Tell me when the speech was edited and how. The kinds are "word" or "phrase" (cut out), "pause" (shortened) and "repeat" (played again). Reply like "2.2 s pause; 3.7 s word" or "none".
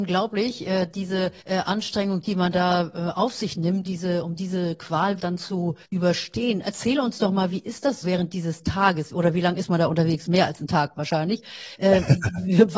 1.4 s pause; 3.8 s word; 5.2 s word; 5.8 s pause; 8.0 s word